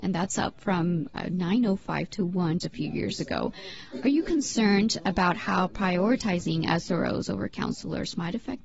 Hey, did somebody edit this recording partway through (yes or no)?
yes